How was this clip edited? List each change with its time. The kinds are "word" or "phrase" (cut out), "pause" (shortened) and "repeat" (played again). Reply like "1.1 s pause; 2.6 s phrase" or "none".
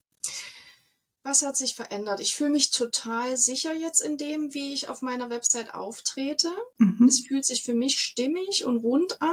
6.7 s pause